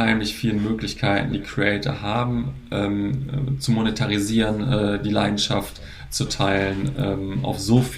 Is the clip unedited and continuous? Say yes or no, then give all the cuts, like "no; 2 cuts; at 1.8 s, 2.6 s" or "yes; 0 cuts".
yes; 0 cuts